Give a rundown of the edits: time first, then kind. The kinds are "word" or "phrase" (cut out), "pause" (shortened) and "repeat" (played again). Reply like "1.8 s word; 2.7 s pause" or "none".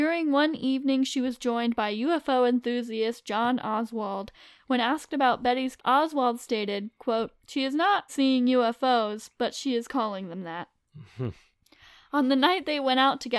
5.8 s phrase; 8.1 s word

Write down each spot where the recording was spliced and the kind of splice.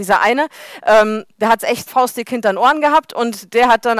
1.3 s pause; 1.9 s word

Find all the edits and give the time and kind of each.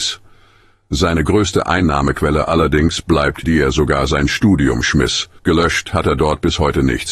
3.4 s phrase; 5.4 s pause

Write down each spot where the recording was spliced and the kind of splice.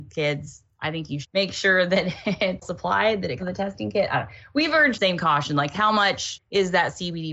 1.2 s word; 2.6 s word; 3.4 s word; 4.9 s word; 5.7 s word

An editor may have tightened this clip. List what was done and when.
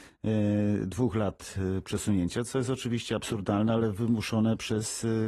none

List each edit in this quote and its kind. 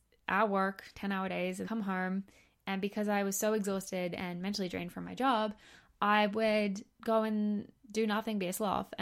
0.9 s word; 1.6 s word; 6.9 s word; 7.8 s word

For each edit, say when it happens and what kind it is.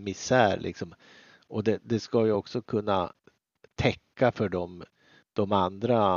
none

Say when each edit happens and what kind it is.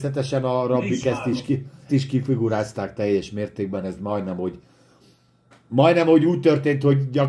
1.9 s word

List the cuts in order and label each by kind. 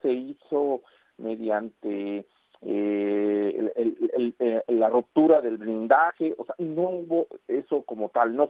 none

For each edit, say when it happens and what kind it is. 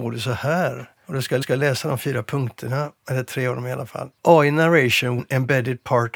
1.0 s pause; 1.4 s repeat; 3.0 s pause; 4.2 s pause; 5.2 s phrase

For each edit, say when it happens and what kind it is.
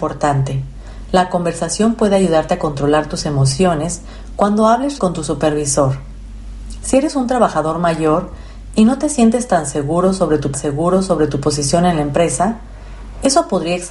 5.0 s word; 10.5 s repeat

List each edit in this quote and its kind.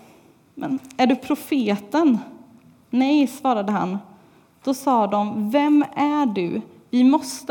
none

